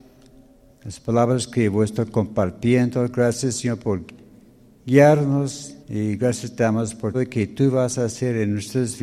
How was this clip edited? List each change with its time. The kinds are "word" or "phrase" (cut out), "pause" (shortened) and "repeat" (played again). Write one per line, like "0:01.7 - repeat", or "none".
0:05.8 - pause
0:07.1 - word